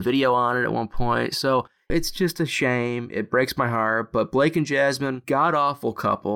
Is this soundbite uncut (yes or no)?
no